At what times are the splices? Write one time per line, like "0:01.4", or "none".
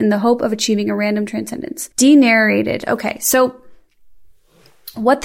0:01.9